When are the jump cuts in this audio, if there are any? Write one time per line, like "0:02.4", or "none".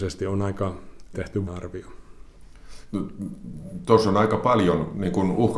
0:01.1
0:01.5